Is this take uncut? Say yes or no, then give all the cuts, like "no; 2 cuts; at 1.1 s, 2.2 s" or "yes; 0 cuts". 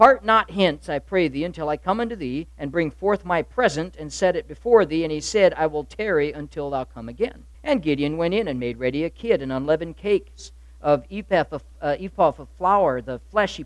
no; 2 cuts; at 2.5 s, 7.5 s